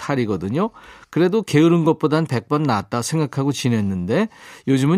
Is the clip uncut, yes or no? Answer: yes